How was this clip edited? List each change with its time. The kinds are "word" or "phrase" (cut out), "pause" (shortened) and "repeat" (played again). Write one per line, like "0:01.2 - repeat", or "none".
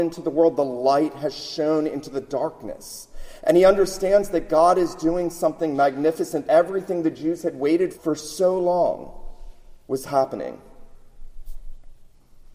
0:06.4 - word
0:07.9 - word